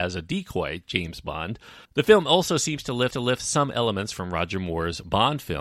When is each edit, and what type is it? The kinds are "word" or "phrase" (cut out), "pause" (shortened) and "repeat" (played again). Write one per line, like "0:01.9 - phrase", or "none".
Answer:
0:01.8 - pause
0:03.1 - repeat